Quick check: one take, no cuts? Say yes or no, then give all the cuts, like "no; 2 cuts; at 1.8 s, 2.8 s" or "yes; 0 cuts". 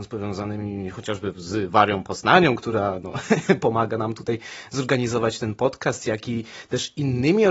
yes; 0 cuts